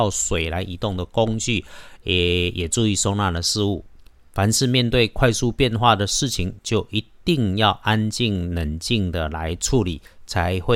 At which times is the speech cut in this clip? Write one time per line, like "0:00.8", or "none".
none